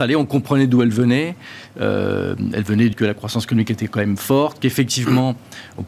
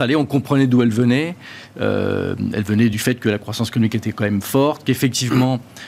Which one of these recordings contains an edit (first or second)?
first